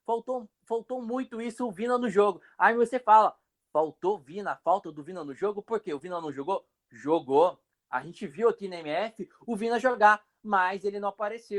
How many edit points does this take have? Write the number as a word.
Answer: zero